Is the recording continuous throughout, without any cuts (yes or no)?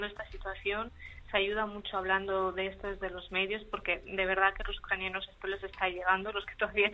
yes